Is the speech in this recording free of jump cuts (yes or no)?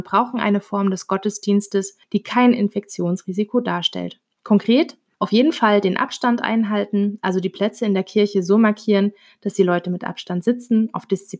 yes